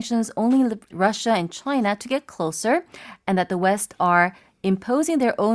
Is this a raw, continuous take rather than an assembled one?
no; 1 cut; at 0.9 s

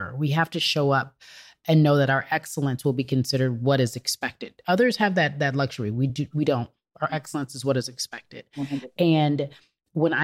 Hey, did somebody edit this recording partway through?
no; 0 cuts

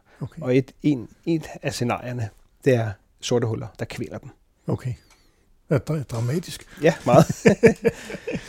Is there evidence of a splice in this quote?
yes; 1 cut; at 3.7 s

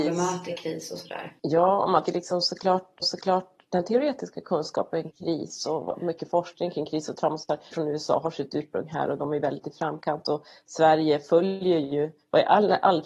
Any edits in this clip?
yes; 5 cuts; at 1.4 s, 2.1 s, 3.0 s, 5.1 s, 7.7 s

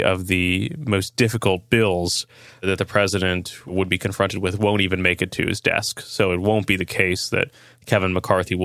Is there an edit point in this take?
no; 0 cuts

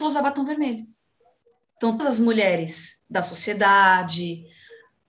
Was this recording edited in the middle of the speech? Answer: yes; 1 cut; at 2.0 s

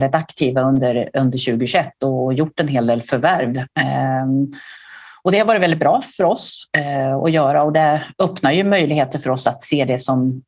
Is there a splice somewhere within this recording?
no; 0 cuts

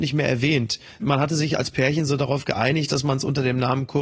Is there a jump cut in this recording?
no; 0 cuts

